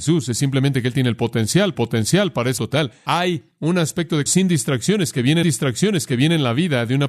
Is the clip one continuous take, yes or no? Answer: no